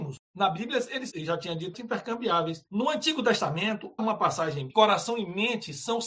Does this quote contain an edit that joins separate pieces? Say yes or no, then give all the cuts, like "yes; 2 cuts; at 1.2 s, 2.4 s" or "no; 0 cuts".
yes; 5 cuts; at 1.1 s, 1.7 s, 2.7 s, 4.0 s, 4.7 s